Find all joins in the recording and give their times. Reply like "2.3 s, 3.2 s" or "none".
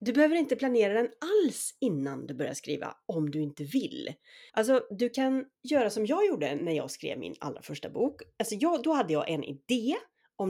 4.5 s, 5.5 s